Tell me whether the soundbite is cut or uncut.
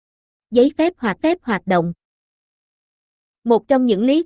cut